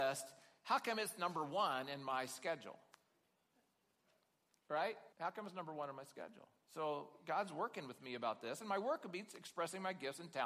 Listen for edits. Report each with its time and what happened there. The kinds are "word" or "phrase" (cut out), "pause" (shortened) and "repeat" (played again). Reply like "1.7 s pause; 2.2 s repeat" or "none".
5.1 s pause